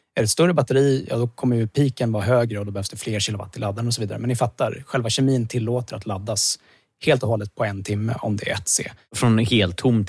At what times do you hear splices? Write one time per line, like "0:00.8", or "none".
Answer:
none